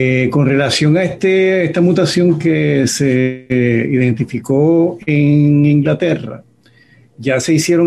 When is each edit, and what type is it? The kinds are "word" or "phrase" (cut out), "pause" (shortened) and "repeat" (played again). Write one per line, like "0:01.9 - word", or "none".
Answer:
none

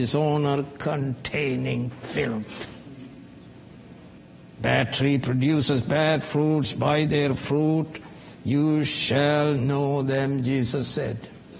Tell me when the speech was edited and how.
none

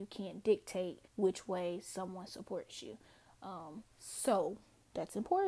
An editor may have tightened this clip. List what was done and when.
0:01.1 - pause
0:03.9 - pause

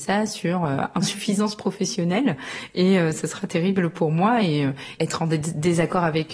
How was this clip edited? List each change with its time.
none

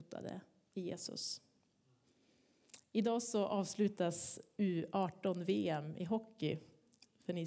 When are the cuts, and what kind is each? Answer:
none

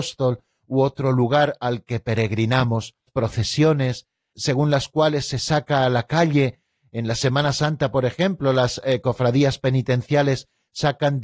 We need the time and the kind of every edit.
0:03.1 - word

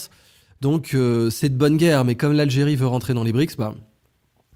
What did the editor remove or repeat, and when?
none

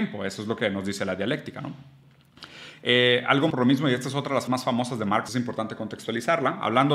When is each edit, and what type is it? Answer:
0:03.5 - phrase
0:04.5 - word
0:05.3 - word

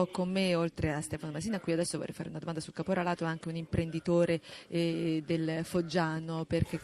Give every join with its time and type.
none

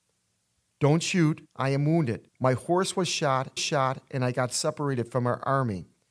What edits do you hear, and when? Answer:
0:01.5 - pause
0:02.3 - pause
0:03.6 - repeat

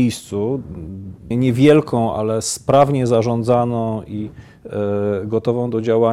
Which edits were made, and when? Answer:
0:01.3 - phrase

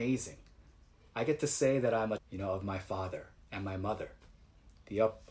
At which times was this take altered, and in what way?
0:02.2 - word

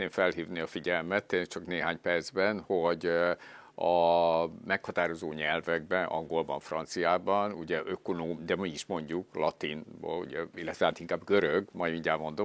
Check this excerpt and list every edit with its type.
none

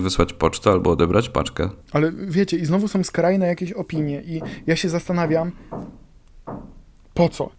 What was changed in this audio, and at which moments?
0:01.8 - pause

